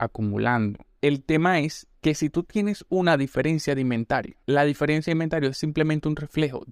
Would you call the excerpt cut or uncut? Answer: uncut